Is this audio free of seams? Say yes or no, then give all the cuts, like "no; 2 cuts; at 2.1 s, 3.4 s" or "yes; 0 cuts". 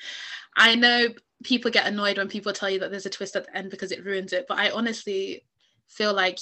yes; 0 cuts